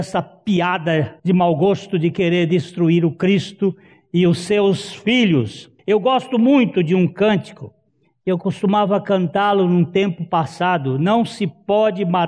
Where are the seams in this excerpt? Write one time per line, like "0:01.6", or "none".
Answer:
0:01.2
0:05.8